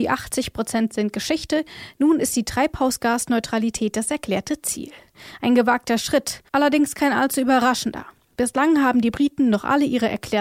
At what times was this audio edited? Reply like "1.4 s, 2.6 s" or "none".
6.5 s